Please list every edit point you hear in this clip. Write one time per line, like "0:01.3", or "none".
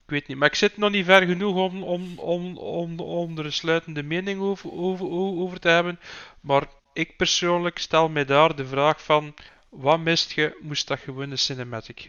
0:06.8
0:09.5

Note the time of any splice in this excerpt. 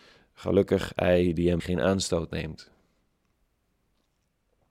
0:01.6

